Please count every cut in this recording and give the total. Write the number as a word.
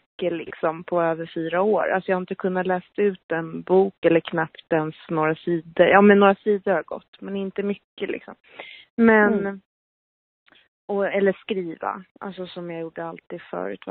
zero